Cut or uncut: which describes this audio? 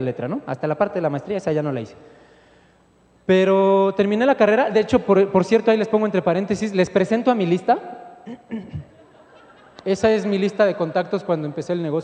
uncut